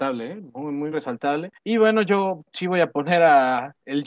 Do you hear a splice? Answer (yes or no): yes